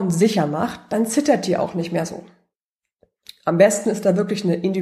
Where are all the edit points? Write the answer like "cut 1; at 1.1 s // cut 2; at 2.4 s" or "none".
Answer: none